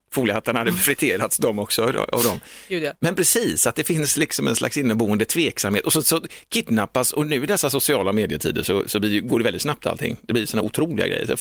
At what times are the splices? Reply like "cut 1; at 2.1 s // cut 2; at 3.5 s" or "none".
none